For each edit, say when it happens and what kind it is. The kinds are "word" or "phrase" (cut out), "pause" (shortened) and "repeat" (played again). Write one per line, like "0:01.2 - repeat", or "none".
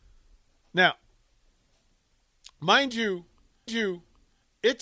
0:03.7 - repeat